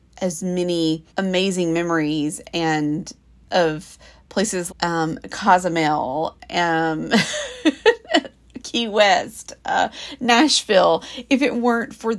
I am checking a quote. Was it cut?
yes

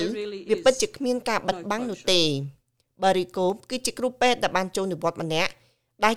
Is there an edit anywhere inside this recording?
no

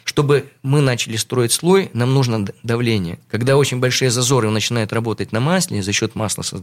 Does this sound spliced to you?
no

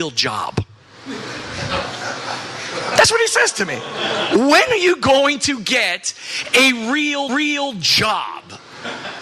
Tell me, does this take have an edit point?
yes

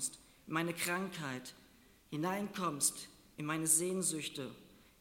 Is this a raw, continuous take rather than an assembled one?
yes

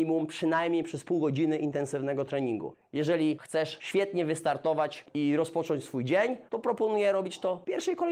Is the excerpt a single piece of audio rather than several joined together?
no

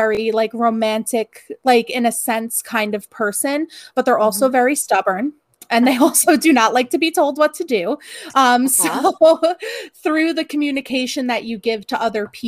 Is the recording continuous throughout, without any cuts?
yes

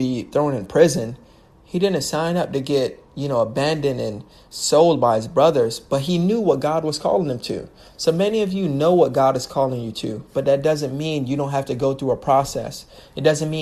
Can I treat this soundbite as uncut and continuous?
yes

